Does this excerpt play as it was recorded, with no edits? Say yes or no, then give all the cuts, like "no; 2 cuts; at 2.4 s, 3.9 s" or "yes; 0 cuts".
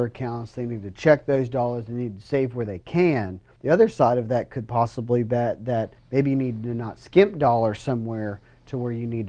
no; 2 cuts; at 3.6 s, 6.0 s